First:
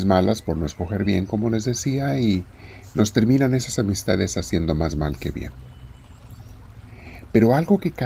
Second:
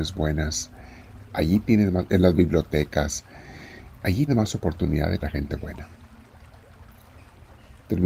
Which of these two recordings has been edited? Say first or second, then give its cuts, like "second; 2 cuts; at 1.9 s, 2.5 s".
second; 2 cuts; at 4.3 s, 5.2 s